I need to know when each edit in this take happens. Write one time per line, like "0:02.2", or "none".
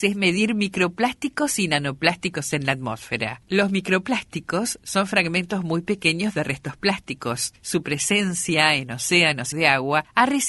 0:09.5